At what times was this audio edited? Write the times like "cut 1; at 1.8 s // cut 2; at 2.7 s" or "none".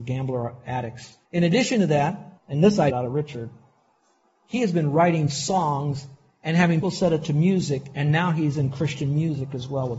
cut 1; at 1.2 s // cut 2; at 2.4 s // cut 3; at 2.9 s // cut 4; at 6.8 s